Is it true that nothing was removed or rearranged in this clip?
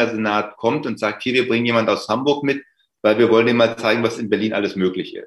yes; 0 cuts

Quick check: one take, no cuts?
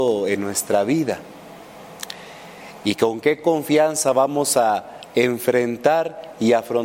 yes; 0 cuts

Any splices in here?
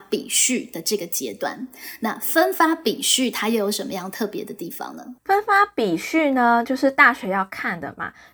yes; 1 cut; at 5.2 s

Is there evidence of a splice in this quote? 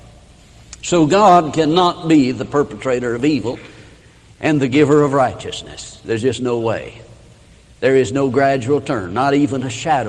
no; 0 cuts

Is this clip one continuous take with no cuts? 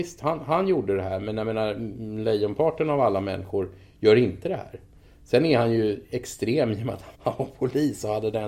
no; 1 cut; at 7.1 s

